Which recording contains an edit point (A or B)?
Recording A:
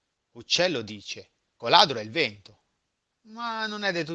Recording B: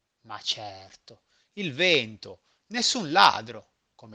A